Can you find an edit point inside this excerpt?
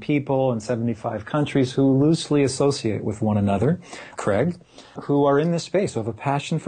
yes; 2 cuts; at 4.2 s, 5.0 s

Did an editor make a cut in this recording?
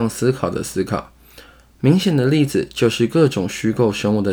no; 0 cuts

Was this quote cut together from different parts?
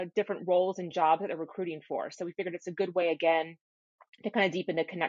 no; 0 cuts

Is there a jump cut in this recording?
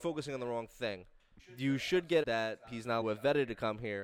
yes; 4 cuts; at 1.4 s, 2.2 s, 2.6 s, 3.0 s

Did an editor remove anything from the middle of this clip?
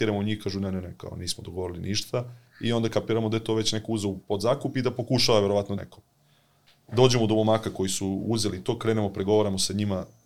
yes; 1 cut; at 5.8 s

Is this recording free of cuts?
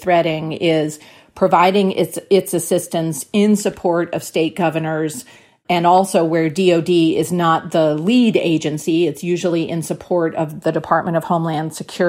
yes; 0 cuts

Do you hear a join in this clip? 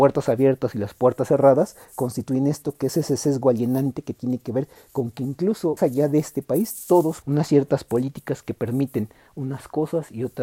yes; 2 cuts; at 5.8 s, 7.2 s

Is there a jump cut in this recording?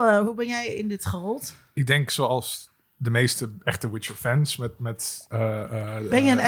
no; 0 cuts

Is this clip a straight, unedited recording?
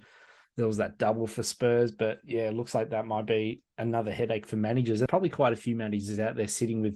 no; 1 cut; at 5.1 s

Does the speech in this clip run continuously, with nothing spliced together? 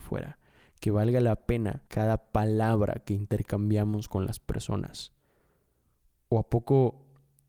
no; 1 cut; at 1.9 s

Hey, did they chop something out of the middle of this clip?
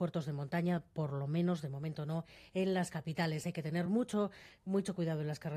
no; 0 cuts

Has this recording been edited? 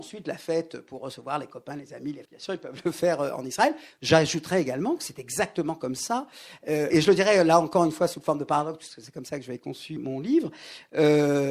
yes; 3 cuts; at 2.3 s, 6.9 s, 10.0 s

